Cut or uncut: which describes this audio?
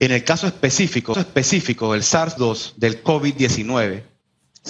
cut